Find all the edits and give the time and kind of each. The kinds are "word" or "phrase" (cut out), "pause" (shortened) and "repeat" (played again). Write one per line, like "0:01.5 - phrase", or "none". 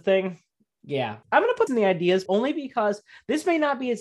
0:01.2 - pause
0:01.7 - word
0:02.3 - word